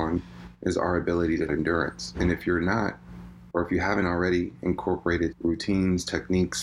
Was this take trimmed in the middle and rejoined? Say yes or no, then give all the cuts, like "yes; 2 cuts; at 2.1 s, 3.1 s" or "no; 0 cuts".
yes; 3 cuts; at 1.5 s, 3.5 s, 5.3 s